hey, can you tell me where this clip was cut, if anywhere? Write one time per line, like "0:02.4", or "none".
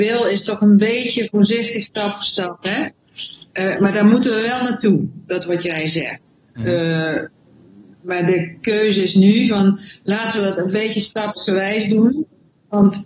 0:03.5